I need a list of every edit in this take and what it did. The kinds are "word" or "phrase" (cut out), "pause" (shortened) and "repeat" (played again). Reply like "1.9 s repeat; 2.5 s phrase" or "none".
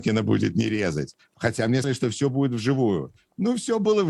1.8 s word

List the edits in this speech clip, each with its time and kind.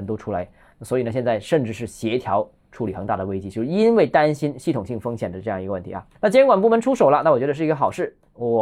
6.1 s pause

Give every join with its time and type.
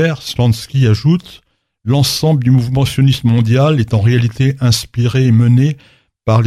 none

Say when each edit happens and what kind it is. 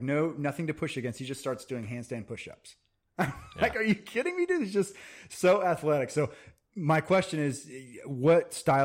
none

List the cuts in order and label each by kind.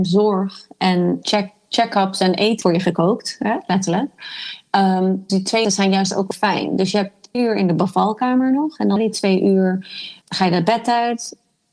1.2 s word; 2.6 s word; 5.3 s word; 5.6 s word; 6.3 s word; 7.3 s word; 9.0 s word; 10.2 s word

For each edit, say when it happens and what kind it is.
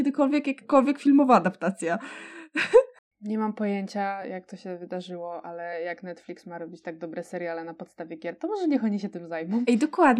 none

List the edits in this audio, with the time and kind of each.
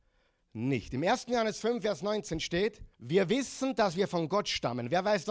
2.9 s pause

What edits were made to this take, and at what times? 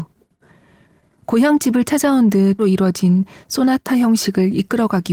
2.6 s phrase

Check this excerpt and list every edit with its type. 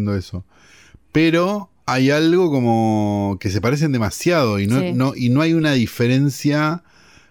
none

